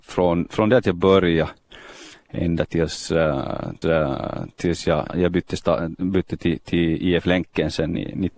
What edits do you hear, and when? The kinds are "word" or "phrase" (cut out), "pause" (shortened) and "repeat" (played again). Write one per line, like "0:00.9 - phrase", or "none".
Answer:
0:03.8 - repeat
0:05.1 - word